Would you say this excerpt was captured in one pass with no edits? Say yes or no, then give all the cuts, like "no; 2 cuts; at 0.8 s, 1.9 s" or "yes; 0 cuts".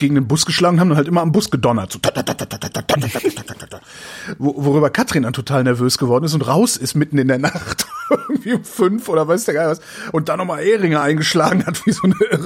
yes; 0 cuts